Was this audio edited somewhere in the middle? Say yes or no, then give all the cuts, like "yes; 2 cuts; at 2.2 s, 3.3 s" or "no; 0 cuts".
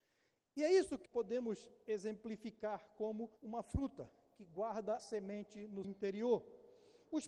yes; 5 cuts; at 1.1 s, 1.8 s, 3.4 s, 5.0 s, 5.8 s